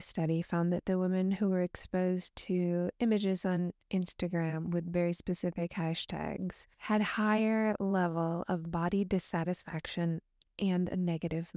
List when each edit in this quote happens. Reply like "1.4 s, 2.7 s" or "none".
6.7 s